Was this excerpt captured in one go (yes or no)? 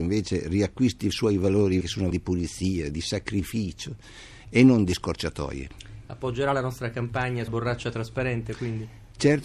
no